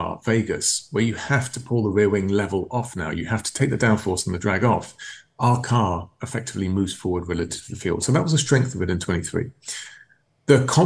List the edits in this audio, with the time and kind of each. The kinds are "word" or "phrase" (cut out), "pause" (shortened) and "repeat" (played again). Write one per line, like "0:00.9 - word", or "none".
none

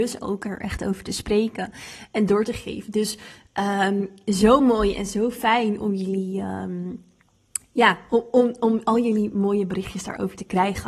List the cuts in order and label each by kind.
none

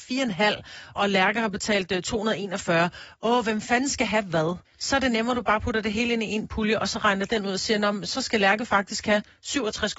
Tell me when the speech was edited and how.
0:01.0 - word
0:04.7 - pause

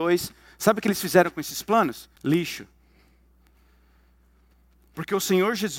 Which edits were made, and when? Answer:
0:02.2 - pause

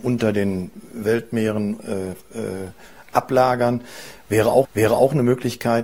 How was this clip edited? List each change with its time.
0:04.6 - repeat

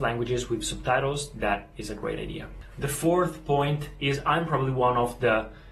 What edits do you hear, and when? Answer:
none

